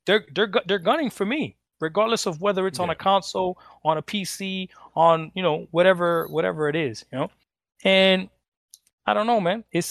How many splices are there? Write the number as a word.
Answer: zero